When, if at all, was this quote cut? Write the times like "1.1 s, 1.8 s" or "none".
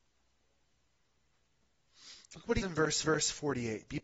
2.6 s, 3.0 s